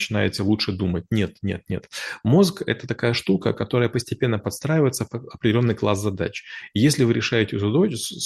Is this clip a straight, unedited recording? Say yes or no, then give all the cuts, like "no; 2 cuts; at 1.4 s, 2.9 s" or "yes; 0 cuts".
yes; 0 cuts